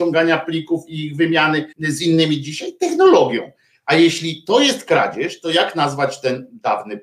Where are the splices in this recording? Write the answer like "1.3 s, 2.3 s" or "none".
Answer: 1.7 s